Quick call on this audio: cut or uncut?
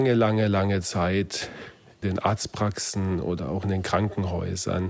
cut